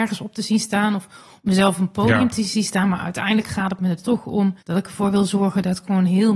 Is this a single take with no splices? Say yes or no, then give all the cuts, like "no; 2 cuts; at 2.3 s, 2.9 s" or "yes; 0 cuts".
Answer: no; 1 cut; at 4.6 s